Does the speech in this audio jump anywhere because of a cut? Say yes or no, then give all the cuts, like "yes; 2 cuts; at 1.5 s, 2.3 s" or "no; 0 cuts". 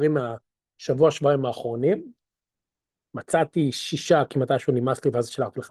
no; 0 cuts